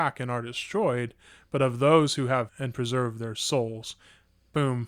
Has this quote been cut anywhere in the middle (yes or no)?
yes